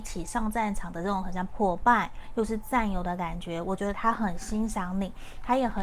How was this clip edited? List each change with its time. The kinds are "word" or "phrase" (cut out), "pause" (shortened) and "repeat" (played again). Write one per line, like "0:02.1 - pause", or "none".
0:01.5 - word